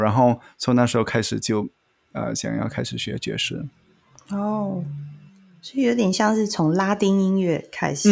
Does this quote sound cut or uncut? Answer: uncut